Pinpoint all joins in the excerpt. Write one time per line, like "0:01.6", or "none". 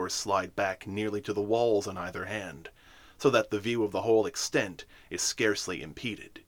none